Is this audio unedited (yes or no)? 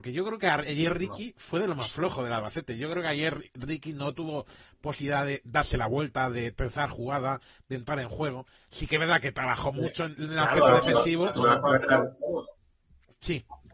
yes